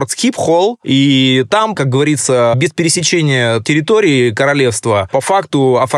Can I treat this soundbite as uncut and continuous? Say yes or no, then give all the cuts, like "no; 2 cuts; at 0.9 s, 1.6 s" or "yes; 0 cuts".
no; 2 cuts; at 1.7 s, 3.6 s